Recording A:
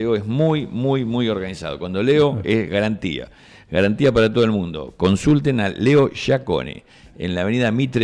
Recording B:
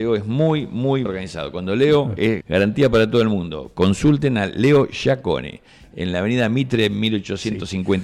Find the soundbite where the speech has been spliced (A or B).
B